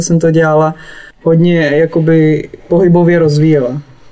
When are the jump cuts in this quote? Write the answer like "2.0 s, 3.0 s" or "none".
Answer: 1.1 s